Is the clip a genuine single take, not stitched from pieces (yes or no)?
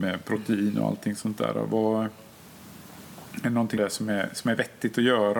no